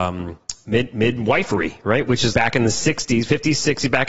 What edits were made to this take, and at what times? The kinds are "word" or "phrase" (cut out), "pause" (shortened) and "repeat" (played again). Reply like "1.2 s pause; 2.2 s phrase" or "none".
2.3 s word